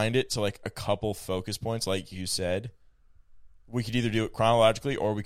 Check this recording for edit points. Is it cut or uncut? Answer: uncut